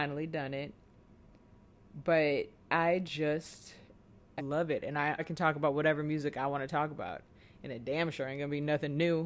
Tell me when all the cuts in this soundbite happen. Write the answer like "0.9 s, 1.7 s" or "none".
4.4 s, 5.2 s